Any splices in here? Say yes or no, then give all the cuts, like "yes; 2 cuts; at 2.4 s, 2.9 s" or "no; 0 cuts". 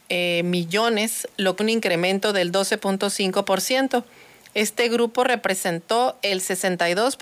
yes; 1 cut; at 1.6 s